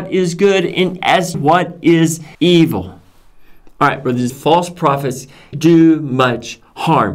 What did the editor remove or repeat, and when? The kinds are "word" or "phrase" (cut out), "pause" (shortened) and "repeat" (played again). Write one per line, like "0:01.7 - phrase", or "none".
0:01.0 - word
0:01.3 - word
0:02.3 - pause
0:04.3 - word
0:05.5 - word